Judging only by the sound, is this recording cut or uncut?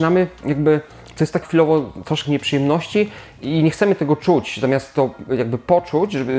cut